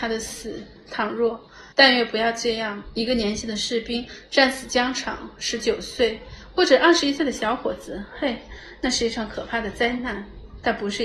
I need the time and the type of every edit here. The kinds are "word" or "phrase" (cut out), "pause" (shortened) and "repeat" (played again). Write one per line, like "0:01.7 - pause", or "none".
0:01.7 - pause